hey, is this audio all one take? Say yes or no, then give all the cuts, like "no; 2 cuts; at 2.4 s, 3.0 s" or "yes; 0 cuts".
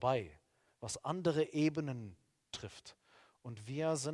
yes; 0 cuts